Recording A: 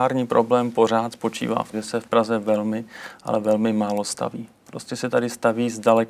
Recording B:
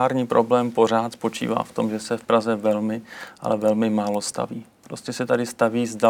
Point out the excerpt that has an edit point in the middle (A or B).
A